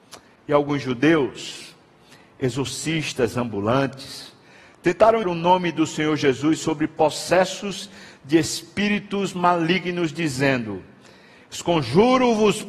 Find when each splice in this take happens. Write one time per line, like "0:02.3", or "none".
0:05.2